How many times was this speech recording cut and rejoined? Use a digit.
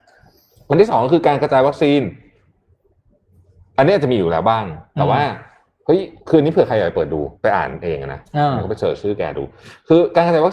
2